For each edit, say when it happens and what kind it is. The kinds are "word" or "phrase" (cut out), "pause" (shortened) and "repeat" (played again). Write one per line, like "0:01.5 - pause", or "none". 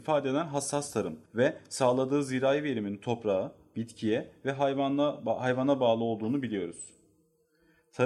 0:01.3 - pause